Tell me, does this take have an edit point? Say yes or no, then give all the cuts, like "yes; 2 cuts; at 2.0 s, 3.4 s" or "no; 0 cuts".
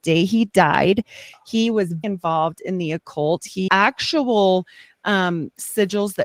yes; 2 cuts; at 2.0 s, 3.7 s